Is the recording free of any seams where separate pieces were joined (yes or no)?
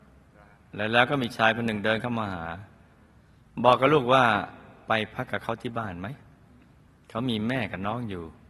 yes